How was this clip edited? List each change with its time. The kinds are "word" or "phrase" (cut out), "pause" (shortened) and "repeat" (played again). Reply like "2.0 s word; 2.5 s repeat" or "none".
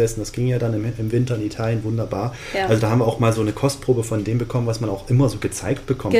none

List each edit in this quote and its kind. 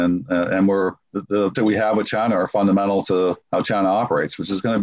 1.0 s pause; 1.5 s word; 3.4 s pause

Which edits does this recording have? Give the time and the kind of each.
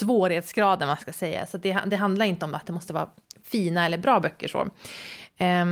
none

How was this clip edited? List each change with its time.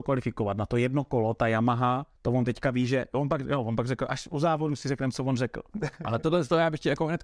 2.2 s pause

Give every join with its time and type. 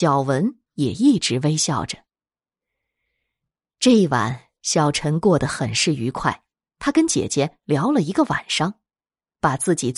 none

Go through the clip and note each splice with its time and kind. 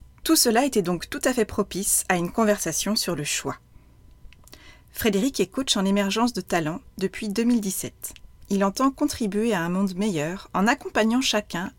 none

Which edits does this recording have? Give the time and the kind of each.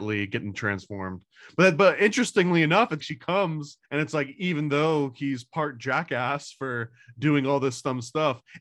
3.0 s word; 3.9 s pause

